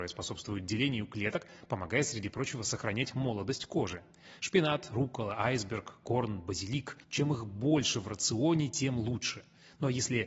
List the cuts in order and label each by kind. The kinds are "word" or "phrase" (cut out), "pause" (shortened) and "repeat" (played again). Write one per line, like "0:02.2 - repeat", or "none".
0:07.0 - pause